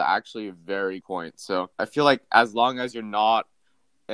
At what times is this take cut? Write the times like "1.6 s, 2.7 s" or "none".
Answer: 1.0 s, 1.7 s

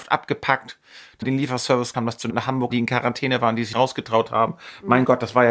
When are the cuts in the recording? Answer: 1.2 s, 1.9 s, 2.3 s, 2.7 s, 3.7 s

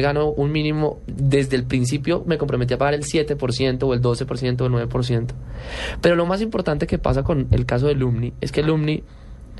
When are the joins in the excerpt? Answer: none

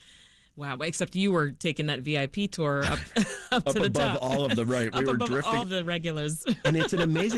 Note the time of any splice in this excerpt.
5.6 s

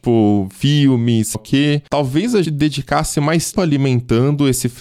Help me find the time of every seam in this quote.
1.3 s, 2.4 s, 3.5 s

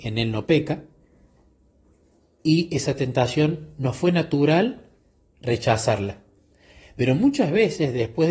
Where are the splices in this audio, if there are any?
none

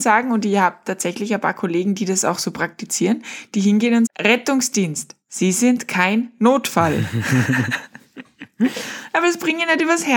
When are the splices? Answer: 4.1 s

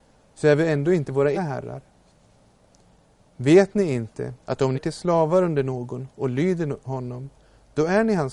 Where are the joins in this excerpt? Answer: 1.3 s, 4.4 s, 4.7 s

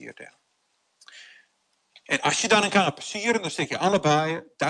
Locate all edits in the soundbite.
none

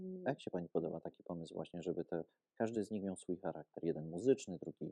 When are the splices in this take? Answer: none

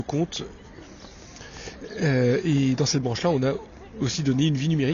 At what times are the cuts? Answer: none

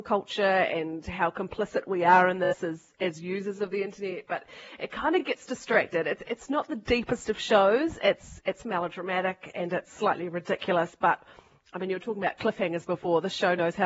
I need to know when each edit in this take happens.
none

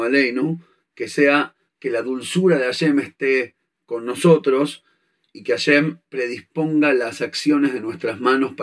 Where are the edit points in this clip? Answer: none

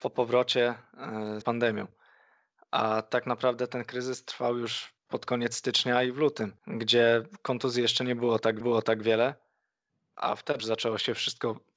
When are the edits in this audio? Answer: 1.4 s, 5.0 s, 6.6 s, 8.6 s, 10.6 s

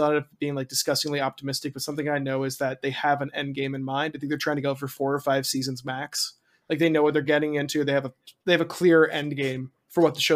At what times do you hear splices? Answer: none

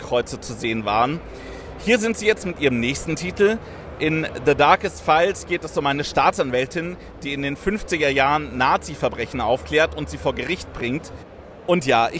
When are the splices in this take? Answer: none

